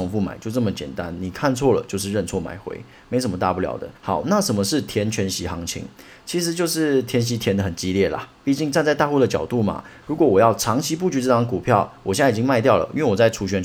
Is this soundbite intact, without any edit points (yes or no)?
no